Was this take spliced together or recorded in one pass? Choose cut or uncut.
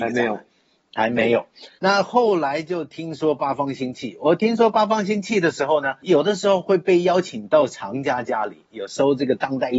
cut